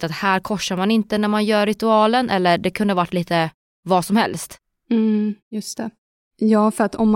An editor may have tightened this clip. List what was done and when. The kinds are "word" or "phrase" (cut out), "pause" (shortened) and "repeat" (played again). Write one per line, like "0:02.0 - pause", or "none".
none